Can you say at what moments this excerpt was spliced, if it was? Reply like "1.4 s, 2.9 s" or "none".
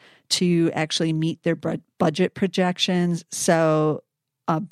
none